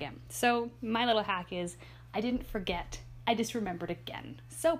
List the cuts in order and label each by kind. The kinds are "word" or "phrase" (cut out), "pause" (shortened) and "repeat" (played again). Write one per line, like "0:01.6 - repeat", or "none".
none